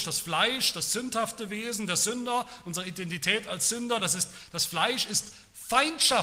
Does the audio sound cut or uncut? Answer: uncut